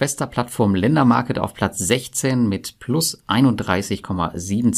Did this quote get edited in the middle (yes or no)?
no